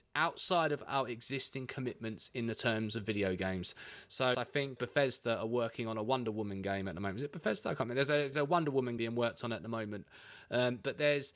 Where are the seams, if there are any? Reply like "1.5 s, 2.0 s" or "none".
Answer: 4.3 s, 4.8 s, 8.3 s, 9.0 s